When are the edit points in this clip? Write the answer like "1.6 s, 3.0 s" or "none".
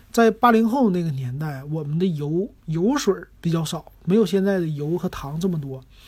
2.6 s